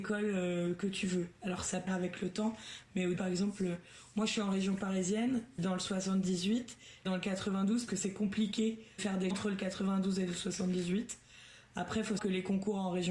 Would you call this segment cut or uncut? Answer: cut